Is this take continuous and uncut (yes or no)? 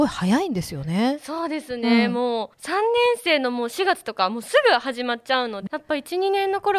no